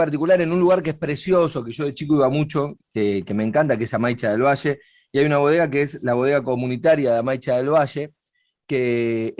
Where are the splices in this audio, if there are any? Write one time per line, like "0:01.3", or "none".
none